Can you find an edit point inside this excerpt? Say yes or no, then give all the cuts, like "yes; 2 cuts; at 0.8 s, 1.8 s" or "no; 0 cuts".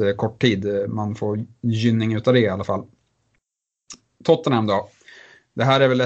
no; 0 cuts